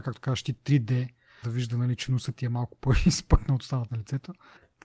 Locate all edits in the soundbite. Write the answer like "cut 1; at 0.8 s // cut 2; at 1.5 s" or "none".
cut 1; at 1.4 s // cut 2; at 3.9 s